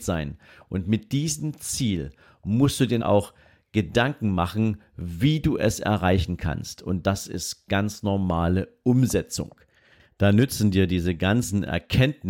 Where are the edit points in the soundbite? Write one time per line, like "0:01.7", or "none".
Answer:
0:03.0